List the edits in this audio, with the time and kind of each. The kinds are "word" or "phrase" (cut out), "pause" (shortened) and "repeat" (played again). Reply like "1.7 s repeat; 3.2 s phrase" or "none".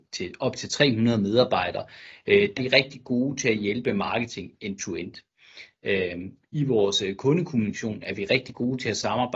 2.6 s word